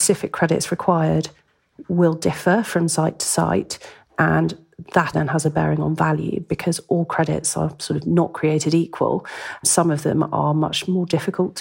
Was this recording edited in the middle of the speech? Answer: yes; 1 cut; at 5.1 s

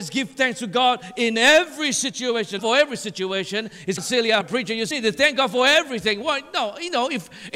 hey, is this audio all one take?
no; 4 cuts; at 2.6 s, 4.0 s, 4.4 s, 4.9 s

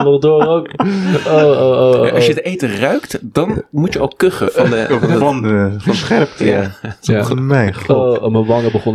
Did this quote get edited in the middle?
no; 0 cuts

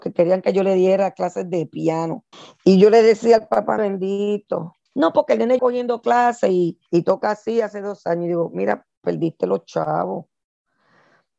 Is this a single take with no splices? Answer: no; 5 cuts; at 2.3 s, 3.8 s, 4.9 s, 5.6 s, 6.9 s

